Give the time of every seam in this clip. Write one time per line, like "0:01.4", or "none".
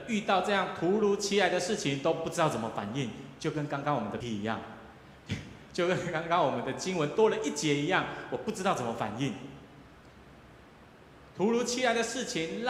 0:04.2

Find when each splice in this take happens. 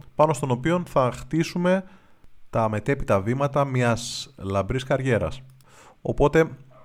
none

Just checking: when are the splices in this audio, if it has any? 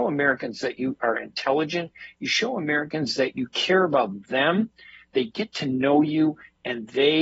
none

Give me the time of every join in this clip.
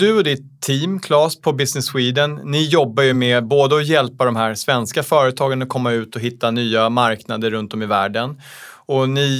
none

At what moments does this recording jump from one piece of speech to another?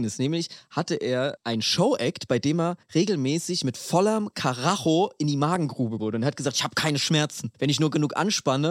0:02.8
0:06.0
0:07.5

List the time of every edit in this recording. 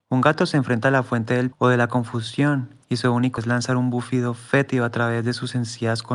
0:01.5
0:02.8
0:03.4

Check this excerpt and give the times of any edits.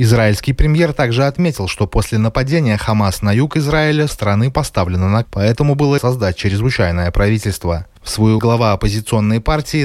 0:04.1
0:05.2
0:06.0
0:08.4

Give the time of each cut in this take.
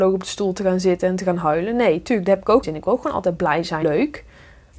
0:02.6
0:03.8

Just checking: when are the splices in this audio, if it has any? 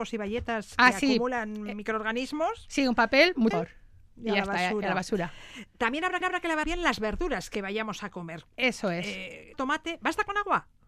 0:03.5
0:06.2
0:06.6
0:09.5

